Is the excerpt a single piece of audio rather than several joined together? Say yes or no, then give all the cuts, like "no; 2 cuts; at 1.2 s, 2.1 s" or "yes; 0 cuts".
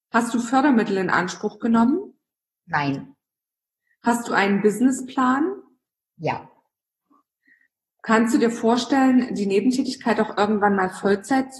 yes; 0 cuts